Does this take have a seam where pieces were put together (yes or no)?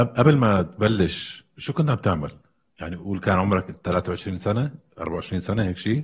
no